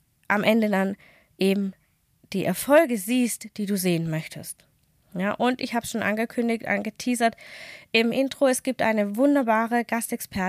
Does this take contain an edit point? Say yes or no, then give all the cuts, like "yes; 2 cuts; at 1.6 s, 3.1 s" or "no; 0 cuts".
no; 0 cuts